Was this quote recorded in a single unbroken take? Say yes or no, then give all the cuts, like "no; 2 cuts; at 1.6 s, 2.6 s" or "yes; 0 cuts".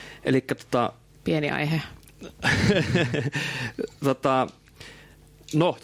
yes; 0 cuts